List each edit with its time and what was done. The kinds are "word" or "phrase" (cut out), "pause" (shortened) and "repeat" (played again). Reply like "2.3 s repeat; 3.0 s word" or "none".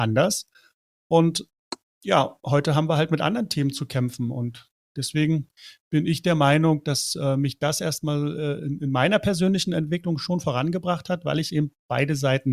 none